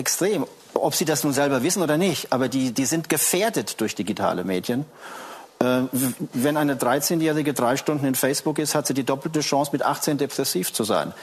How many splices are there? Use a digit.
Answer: 0